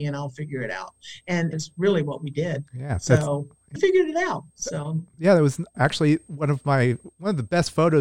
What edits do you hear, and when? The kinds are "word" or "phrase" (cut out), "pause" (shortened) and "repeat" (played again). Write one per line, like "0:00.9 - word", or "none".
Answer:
0:01.5 - phrase
0:02.7 - pause
0:03.8 - word
0:04.5 - pause
0:05.7 - word